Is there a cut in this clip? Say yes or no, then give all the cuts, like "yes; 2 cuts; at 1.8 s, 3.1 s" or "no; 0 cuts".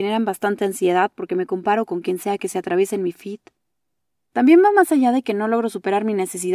no; 0 cuts